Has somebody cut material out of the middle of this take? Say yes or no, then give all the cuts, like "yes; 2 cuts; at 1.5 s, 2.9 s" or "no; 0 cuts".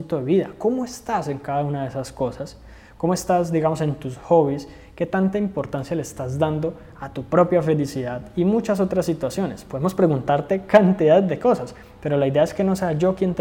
no; 0 cuts